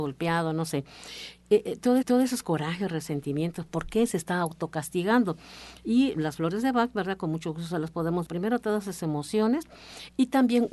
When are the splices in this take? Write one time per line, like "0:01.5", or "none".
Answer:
0:02.0
0:08.2